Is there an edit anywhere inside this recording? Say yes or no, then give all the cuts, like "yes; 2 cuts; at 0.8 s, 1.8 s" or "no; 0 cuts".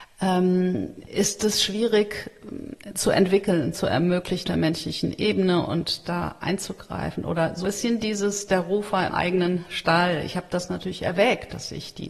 yes; 4 cuts; at 3.7 s, 4.4 s, 7.6 s, 9.1 s